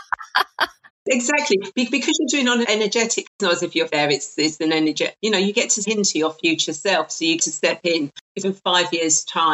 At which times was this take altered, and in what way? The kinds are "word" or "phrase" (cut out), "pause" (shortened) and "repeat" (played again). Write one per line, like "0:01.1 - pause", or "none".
0:02.6 - word
0:03.3 - word
0:03.9 - word
0:05.8 - word
0:07.4 - word
0:08.4 - word